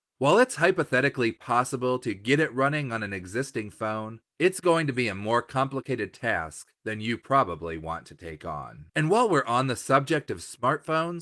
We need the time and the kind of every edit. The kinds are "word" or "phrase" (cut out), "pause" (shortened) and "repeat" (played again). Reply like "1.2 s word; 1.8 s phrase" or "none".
4.3 s pause; 6.7 s pause; 8.9 s pause